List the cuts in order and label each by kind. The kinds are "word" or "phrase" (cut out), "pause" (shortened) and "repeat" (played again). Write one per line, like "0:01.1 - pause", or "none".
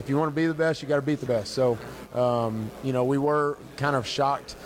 none